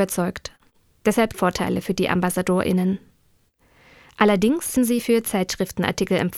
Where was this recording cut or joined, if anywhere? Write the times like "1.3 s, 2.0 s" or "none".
1.3 s, 4.8 s